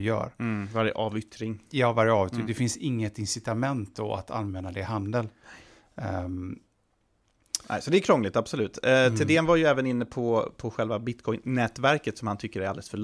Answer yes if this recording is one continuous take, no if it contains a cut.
yes